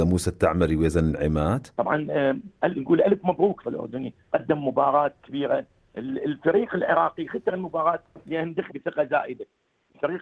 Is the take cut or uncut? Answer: cut